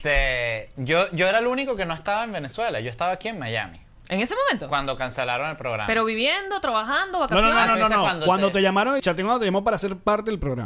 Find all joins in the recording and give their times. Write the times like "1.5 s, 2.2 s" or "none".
9.0 s